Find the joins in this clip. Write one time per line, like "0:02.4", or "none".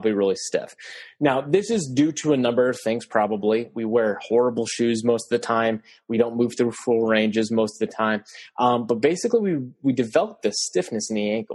none